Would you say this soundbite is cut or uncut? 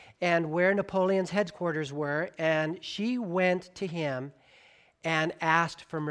uncut